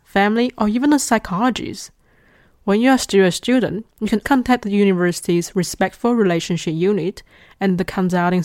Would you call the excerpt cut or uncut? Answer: cut